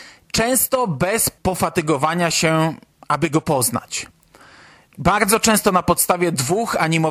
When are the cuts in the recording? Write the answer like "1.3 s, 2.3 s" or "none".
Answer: 1.4 s